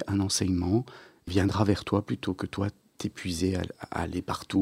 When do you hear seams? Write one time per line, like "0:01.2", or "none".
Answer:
0:01.3